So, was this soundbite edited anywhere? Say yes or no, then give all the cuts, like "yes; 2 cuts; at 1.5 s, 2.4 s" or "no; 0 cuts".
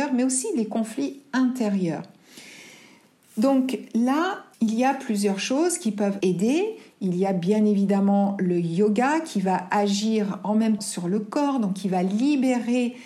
yes; 3 cuts; at 4.5 s, 6.2 s, 10.8 s